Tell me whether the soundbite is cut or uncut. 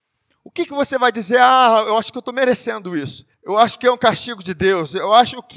cut